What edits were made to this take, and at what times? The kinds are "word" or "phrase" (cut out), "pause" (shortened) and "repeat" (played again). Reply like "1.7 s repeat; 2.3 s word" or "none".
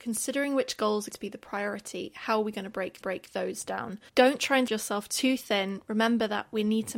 1.1 s word; 3.0 s repeat; 4.1 s pause; 4.7 s word